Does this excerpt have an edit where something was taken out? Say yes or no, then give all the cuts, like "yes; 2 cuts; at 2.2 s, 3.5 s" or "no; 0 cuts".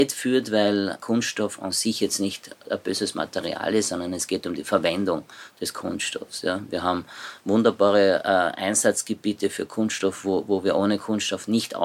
no; 0 cuts